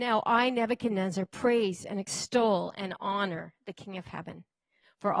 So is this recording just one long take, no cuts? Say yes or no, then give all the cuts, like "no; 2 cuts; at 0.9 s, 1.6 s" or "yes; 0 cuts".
yes; 0 cuts